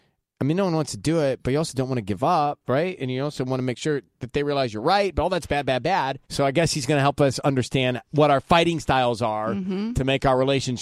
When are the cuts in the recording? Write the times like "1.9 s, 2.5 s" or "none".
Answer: 6.2 s